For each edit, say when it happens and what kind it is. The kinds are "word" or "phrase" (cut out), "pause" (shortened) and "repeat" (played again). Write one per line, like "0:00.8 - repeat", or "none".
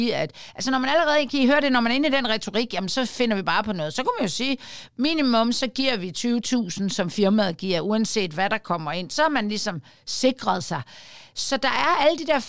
none